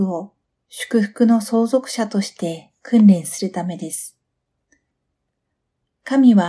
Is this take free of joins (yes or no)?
yes